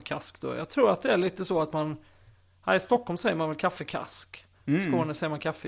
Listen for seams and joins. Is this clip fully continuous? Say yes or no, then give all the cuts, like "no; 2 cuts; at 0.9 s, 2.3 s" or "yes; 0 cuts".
yes; 0 cuts